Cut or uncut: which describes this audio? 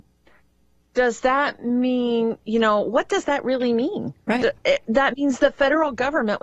uncut